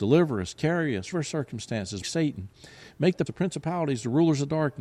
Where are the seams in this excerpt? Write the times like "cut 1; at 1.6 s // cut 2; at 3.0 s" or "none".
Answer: cut 1; at 1.1 s // cut 2; at 2.0 s // cut 3; at 3.3 s